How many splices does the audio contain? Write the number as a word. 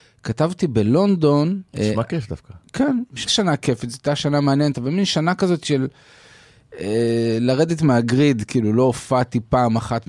two